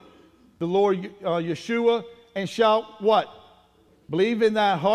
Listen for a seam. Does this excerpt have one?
no; 0 cuts

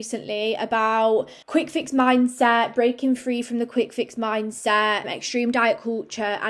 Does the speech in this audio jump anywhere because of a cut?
yes; 2 cuts; at 1.4 s, 5.0 s

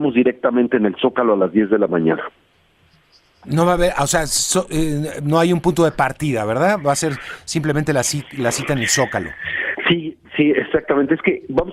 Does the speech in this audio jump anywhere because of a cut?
no; 0 cuts

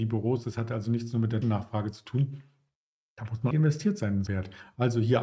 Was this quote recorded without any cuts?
no; 3 cuts; at 1.4 s, 3.5 s, 4.3 s

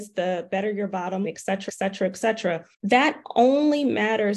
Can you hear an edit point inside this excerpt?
yes; 3 cuts; at 1.2 s, 1.7 s, 2.7 s

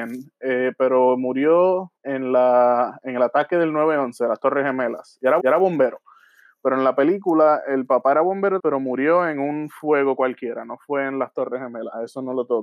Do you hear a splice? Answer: yes; 3 cuts; at 2.0 s, 5.4 s, 8.6 s

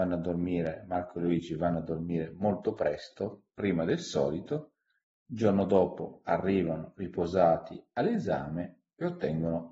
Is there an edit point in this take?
no; 0 cuts

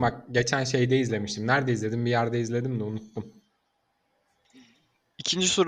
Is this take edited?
no; 0 cuts

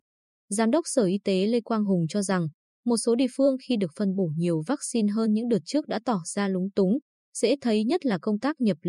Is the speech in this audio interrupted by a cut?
no; 0 cuts

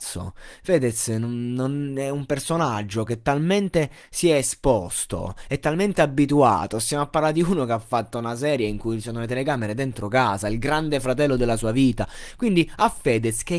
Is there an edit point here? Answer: no; 0 cuts

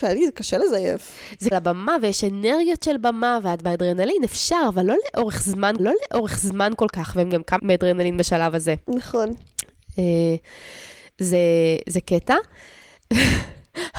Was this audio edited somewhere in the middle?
yes; 4 cuts; at 1.5 s, 5.8 s, 7.6 s, 8.8 s

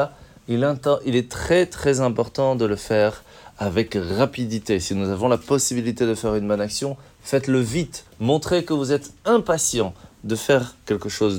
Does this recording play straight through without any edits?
no; 1 cut; at 8.1 s

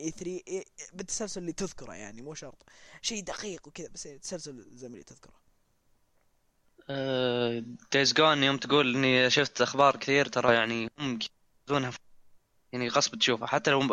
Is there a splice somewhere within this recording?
no; 0 cuts

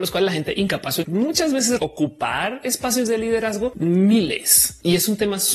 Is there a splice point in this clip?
yes; 3 cuts; at 1.0 s, 1.8 s, 3.7 s

